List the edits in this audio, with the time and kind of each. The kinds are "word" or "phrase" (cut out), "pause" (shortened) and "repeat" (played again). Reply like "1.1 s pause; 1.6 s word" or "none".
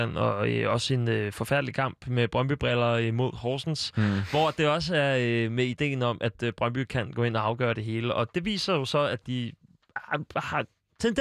none